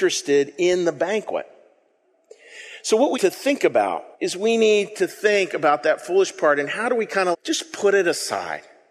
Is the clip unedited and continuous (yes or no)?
no